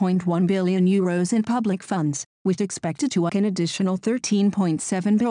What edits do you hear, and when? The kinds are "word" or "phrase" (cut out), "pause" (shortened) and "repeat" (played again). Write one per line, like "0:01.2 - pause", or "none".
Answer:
0:02.6 - word
0:03.3 - word